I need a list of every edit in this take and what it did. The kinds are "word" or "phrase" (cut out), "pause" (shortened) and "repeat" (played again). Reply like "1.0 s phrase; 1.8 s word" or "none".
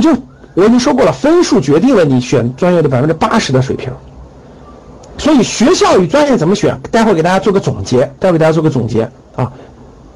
8.2 s pause